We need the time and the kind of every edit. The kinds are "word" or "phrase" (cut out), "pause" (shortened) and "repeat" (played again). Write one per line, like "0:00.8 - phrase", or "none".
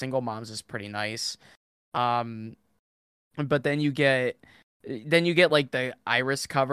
none